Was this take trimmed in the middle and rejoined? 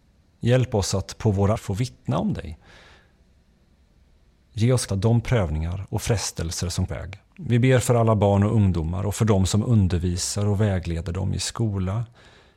yes; 4 cuts; at 1.6 s, 4.9 s, 6.9 s, 7.3 s

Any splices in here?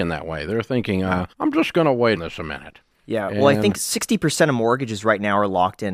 yes; 2 cuts; at 1.3 s, 2.2 s

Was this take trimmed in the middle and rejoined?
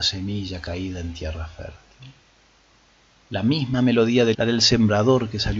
yes; 1 cut; at 4.3 s

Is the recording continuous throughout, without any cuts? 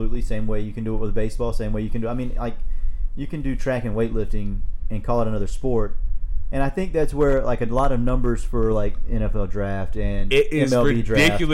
yes; 0 cuts

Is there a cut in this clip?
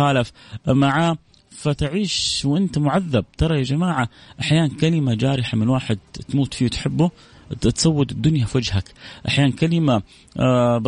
no; 0 cuts

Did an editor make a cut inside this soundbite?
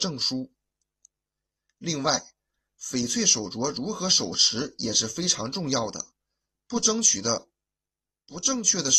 no; 0 cuts

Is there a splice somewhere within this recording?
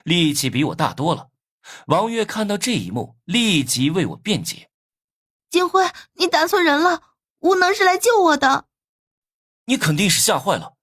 yes; 2 cuts; at 4.7 s, 8.9 s

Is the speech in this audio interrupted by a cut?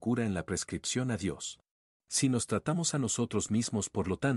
yes; 1 cut; at 1.8 s

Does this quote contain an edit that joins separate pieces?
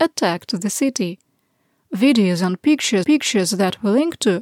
yes; 1 cut; at 3.0 s

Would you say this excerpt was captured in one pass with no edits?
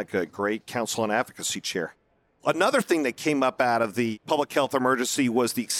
yes; 0 cuts

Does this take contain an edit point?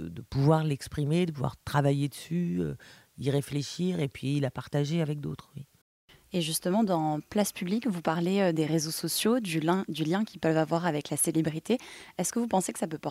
yes; 1 cut; at 5.8 s

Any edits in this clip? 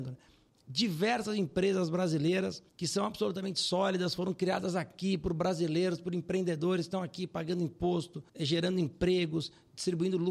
yes; 2 cuts; at 2.7 s, 8.3 s

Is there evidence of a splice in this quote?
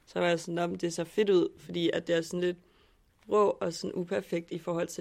no; 0 cuts

